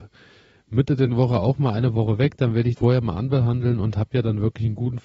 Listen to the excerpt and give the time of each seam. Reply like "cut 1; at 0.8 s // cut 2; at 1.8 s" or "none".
cut 1; at 1.1 s // cut 2; at 2.7 s